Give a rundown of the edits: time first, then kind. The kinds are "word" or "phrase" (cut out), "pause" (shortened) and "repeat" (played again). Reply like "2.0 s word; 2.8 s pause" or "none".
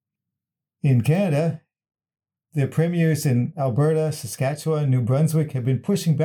none